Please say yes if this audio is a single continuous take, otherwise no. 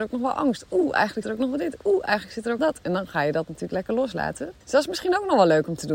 no